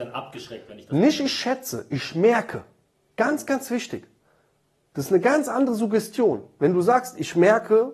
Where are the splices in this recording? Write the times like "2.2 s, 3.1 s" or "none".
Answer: none